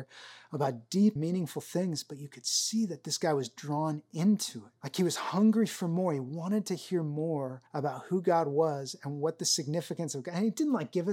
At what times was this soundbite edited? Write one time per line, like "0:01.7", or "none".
0:01.2
0:04.8
0:07.7